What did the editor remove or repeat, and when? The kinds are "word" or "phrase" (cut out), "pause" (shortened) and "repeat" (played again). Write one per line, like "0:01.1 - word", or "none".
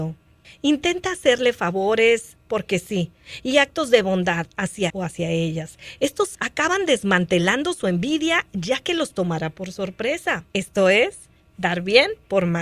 0:02.4 - word
0:04.9 - word
0:06.3 - word
0:10.5 - pause